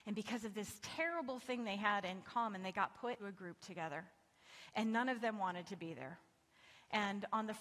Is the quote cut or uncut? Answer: cut